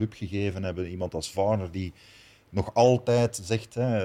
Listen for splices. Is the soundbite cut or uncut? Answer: uncut